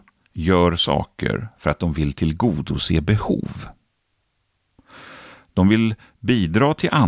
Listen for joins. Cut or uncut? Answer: uncut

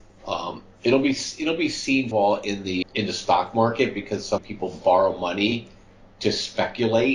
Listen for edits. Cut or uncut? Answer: cut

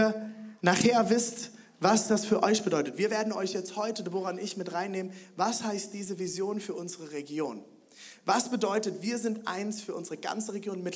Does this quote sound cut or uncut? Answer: uncut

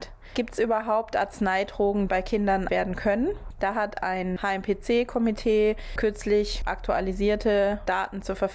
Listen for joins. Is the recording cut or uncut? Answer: cut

